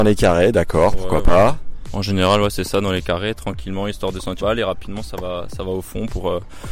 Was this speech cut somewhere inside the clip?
yes; 1 cut; at 4.4 s

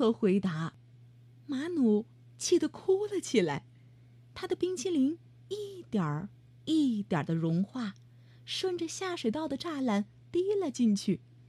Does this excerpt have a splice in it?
no; 0 cuts

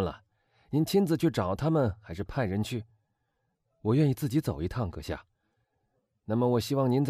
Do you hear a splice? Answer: no; 0 cuts

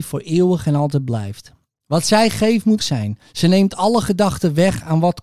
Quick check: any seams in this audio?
yes; 1 cut; at 2.8 s

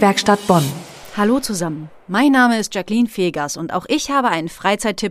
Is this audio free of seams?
yes; 0 cuts

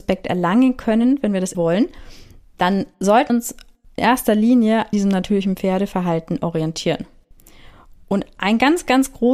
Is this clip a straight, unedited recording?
no; 4 cuts; at 1.5 s, 3.3 s, 4.0 s, 4.9 s

